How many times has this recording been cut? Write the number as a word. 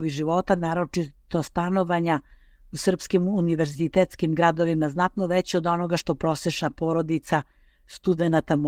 zero